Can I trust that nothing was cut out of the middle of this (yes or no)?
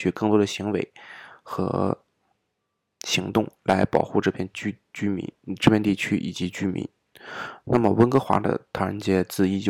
yes